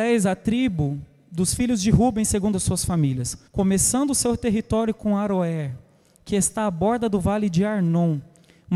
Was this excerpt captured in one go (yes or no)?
no